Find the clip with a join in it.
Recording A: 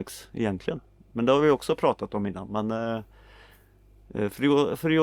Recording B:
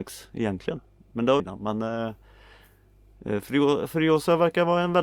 B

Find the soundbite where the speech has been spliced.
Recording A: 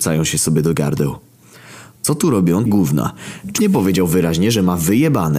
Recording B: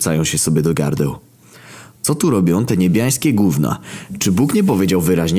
A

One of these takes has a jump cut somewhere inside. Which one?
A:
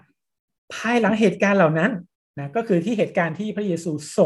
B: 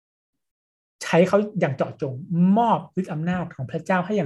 A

